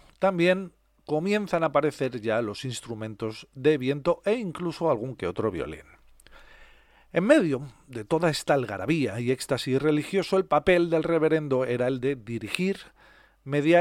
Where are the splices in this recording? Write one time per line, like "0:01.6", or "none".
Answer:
none